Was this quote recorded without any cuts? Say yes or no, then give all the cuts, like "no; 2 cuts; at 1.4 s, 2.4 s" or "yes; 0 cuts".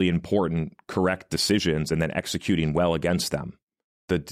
yes; 0 cuts